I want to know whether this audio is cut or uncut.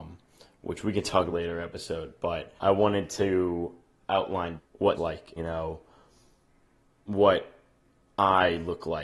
cut